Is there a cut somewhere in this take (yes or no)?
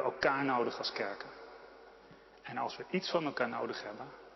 no